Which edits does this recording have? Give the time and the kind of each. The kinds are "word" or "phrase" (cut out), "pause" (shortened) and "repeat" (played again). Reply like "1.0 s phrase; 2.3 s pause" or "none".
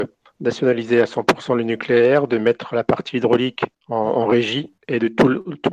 3.8 s pause; 4.8 s pause